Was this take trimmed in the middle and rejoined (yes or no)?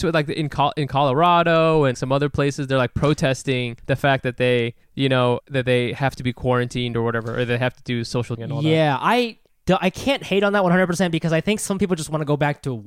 yes